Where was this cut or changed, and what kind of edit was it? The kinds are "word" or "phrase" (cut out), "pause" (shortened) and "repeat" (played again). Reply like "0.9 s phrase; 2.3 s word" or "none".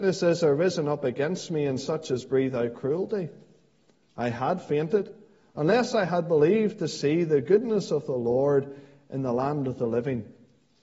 none